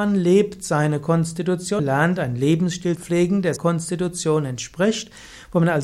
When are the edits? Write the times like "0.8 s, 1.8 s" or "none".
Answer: 1.8 s, 3.0 s, 3.6 s